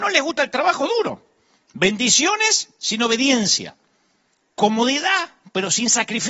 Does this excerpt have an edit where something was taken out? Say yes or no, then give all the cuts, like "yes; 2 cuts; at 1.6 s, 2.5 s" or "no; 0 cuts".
no; 0 cuts